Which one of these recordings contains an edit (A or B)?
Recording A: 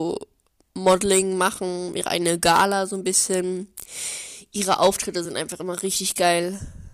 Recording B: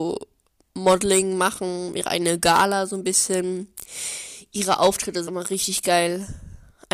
B